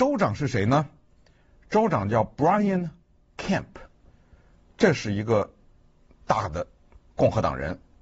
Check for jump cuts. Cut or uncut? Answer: uncut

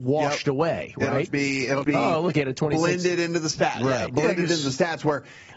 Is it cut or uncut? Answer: cut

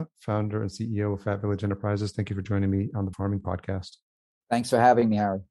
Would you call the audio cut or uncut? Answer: cut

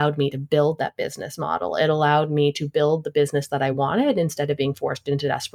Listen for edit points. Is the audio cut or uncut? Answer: uncut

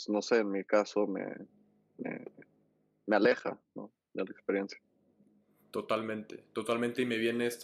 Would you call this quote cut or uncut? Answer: uncut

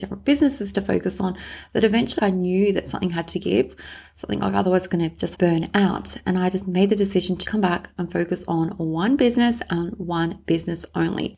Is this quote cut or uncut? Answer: cut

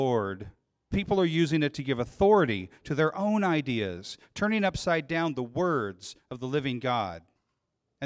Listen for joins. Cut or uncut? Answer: cut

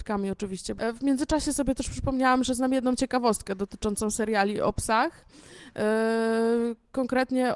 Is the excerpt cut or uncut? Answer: uncut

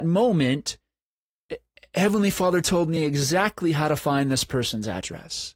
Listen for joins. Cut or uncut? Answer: uncut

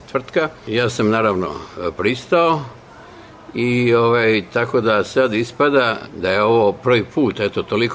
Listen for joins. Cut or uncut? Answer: uncut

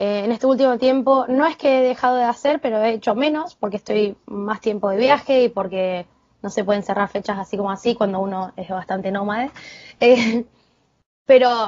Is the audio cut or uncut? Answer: uncut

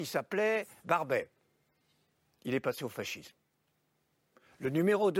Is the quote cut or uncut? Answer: uncut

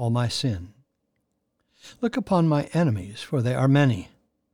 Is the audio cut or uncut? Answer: uncut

